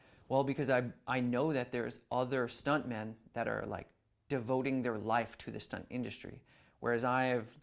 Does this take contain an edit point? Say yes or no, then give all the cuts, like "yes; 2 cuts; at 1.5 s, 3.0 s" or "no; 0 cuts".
no; 0 cuts